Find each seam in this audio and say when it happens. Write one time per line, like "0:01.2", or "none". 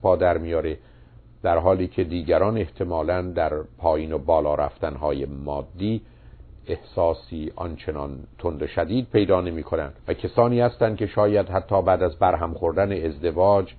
0:10.0